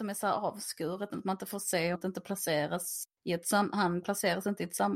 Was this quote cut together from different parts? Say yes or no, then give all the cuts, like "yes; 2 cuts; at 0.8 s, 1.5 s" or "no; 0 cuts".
yes; 3 cuts; at 1.1 s, 1.9 s, 3.1 s